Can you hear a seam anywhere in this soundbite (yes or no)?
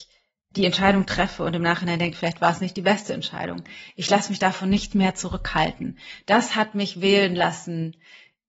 no